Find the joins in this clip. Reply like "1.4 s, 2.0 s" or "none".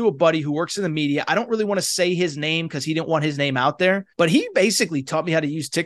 4.1 s